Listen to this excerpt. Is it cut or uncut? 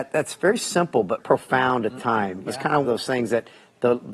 cut